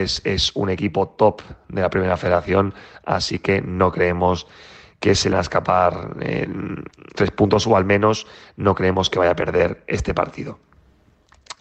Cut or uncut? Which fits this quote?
cut